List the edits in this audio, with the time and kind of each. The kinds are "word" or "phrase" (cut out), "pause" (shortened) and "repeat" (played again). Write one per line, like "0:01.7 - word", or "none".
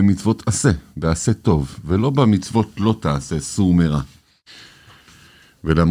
none